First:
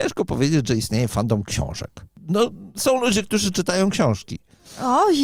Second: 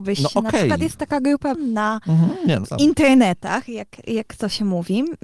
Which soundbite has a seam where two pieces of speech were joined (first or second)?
second